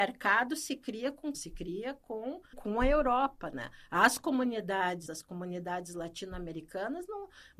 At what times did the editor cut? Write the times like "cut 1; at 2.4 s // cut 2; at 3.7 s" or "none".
cut 1; at 1.3 s // cut 2; at 2.5 s // cut 3; at 5.1 s

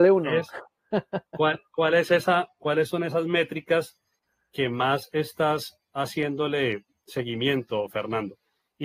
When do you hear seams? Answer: none

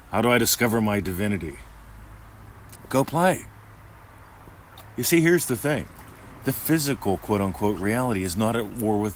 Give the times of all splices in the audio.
none

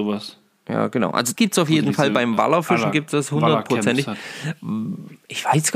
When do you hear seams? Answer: cut 1; at 1.4 s

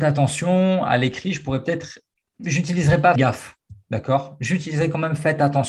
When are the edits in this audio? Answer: cut 1; at 3.2 s

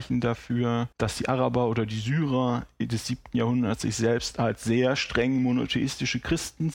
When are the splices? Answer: cut 1; at 0.9 s

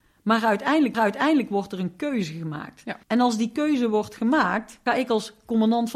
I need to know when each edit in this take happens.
cut 1; at 0.9 s // cut 2; at 3.0 s // cut 3; at 4.9 s

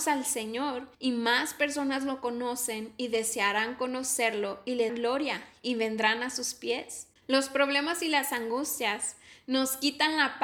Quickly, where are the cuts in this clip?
cut 1; at 0.9 s // cut 2; at 4.9 s // cut 3; at 7.2 s

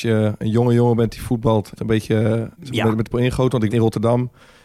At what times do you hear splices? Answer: cut 1; at 1.8 s // cut 2; at 2.5 s // cut 3; at 3.1 s // cut 4; at 3.7 s

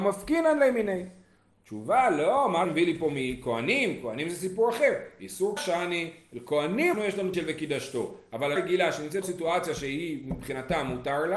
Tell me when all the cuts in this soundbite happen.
cut 1; at 2.6 s // cut 2; at 5.6 s // cut 3; at 6.9 s // cut 4; at 7.3 s // cut 5; at 8.6 s // cut 6; at 9.2 s

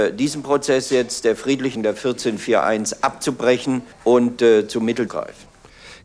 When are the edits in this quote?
cut 1; at 1.8 s // cut 2; at 3.9 s // cut 3; at 5.1 s

